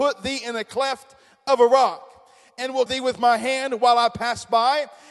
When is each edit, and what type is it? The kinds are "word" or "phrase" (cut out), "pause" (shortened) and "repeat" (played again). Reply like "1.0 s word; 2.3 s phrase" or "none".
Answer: 2.9 s word